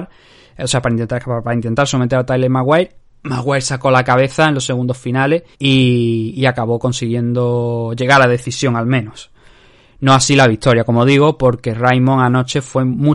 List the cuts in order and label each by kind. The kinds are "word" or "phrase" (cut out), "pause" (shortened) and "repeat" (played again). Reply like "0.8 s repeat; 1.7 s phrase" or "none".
5.5 s pause